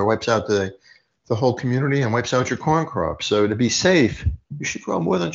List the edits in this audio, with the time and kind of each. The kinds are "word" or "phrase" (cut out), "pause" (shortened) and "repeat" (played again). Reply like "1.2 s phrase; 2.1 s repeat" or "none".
none